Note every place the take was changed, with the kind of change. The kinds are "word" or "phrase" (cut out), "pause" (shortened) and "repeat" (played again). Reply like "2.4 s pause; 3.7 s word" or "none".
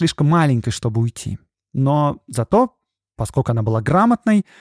none